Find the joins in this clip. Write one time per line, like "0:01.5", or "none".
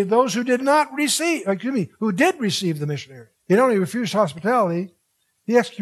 0:03.4